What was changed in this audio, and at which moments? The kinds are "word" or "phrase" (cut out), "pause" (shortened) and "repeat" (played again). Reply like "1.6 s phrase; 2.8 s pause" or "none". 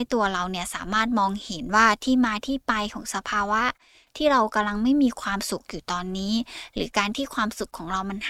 none